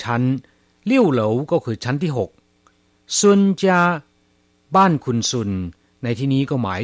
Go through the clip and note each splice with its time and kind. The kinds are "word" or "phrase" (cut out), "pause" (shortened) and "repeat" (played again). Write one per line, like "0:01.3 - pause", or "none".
none